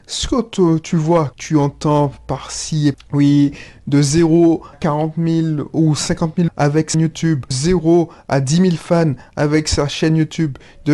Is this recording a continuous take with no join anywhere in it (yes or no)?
no